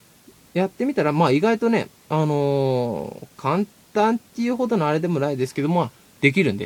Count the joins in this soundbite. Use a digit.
1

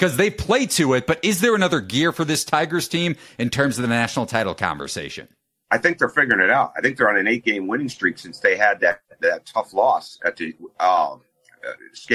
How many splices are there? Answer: 0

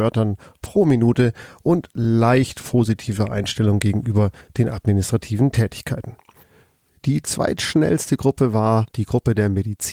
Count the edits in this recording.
0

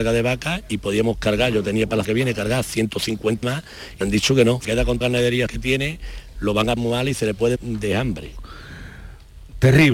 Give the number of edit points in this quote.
8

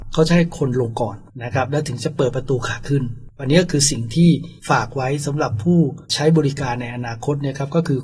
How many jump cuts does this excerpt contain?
2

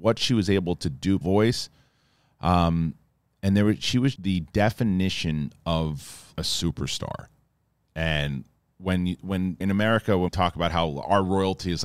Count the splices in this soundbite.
6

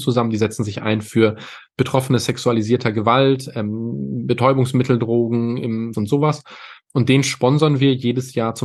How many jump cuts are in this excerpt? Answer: 1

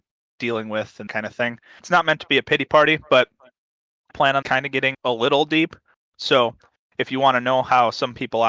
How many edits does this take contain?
6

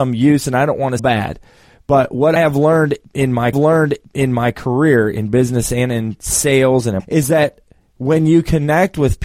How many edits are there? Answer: 4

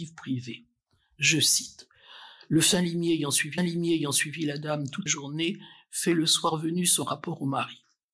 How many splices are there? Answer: 2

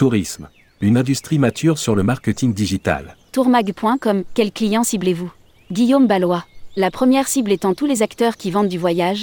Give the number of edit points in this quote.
2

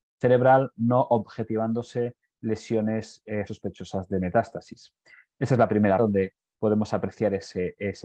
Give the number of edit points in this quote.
2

